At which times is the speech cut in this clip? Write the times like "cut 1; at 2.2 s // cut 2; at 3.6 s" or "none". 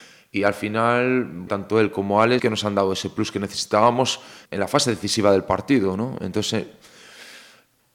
cut 1; at 1.5 s // cut 2; at 2.4 s // cut 3; at 4.5 s